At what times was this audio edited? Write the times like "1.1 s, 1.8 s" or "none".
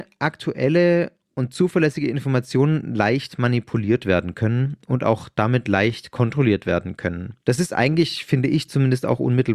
7.4 s